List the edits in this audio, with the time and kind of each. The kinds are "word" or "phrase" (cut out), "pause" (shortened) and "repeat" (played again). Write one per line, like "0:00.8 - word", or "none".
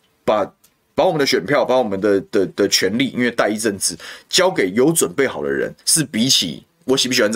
0:05.8 - pause